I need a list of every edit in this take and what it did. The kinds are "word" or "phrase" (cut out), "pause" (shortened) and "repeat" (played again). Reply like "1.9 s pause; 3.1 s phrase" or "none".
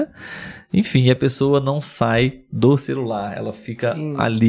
none